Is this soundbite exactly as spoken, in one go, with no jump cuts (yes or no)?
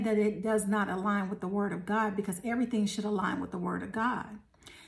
yes